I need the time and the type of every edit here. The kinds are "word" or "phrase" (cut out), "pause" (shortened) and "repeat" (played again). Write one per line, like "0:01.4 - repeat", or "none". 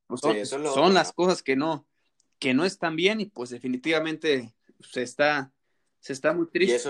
none